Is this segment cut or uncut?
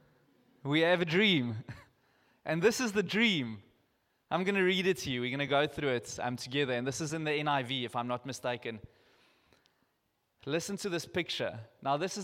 uncut